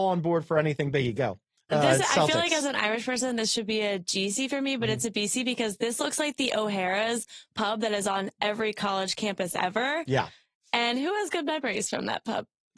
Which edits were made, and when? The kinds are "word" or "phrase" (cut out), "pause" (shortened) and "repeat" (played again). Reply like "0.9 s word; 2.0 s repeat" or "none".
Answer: none